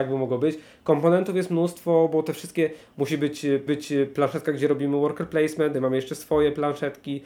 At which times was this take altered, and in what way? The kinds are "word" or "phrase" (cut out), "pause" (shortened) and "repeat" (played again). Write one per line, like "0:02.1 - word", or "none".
0:03.7 - repeat
0:05.7 - phrase